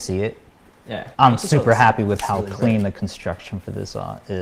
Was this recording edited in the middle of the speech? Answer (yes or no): yes